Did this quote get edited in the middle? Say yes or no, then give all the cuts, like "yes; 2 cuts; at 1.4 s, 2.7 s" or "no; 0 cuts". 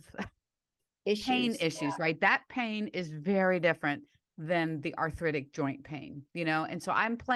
no; 0 cuts